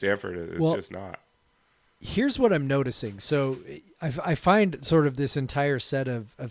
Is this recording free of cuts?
yes; 0 cuts

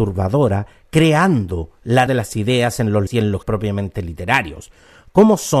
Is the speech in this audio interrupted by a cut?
yes; 3 cuts; at 2.1 s, 3.1 s, 3.4 s

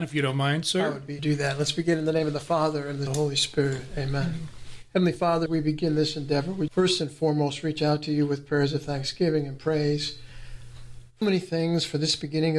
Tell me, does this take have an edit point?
yes; 5 cuts; at 1.2 s, 3.1 s, 5.5 s, 6.7 s, 11.2 s

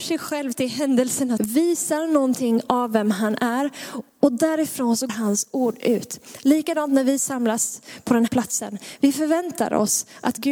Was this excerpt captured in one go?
no; 4 cuts; at 1.4 s, 4.1 s, 5.1 s, 8.3 s

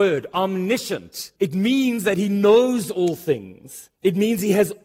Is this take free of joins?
no; 2 cuts; at 1.4 s, 4.0 s

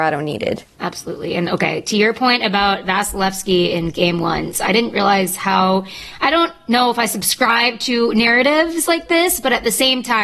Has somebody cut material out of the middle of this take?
no; 0 cuts

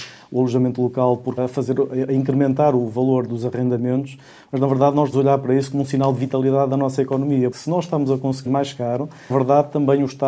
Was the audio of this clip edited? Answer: yes; 5 cuts; at 1.4 s, 5.1 s, 7.5 s, 8.5 s, 9.3 s

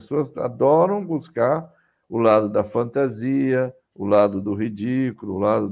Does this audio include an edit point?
yes; 1 cut; at 3.8 s

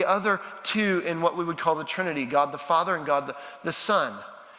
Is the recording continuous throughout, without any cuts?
yes; 0 cuts

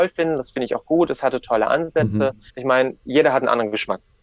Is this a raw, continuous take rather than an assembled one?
no; 1 cut; at 2.5 s

